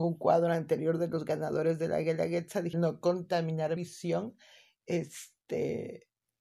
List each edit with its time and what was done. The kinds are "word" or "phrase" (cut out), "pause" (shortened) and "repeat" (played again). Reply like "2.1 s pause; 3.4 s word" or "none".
2.7 s word; 3.8 s word